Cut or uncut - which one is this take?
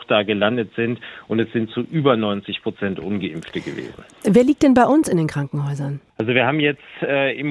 cut